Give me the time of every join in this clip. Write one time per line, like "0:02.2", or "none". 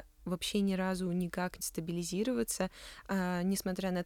0:01.6